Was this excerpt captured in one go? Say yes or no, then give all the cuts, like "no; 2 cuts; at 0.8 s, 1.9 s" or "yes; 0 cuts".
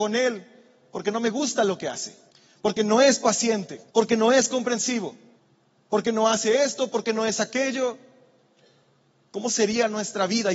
no; 3 cuts; at 2.3 s, 3.9 s, 5.4 s